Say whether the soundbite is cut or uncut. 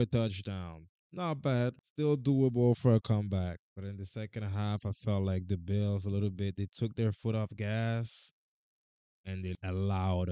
cut